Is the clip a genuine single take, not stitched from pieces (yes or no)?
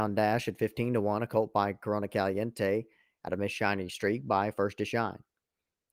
yes